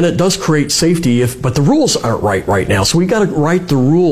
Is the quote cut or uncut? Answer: uncut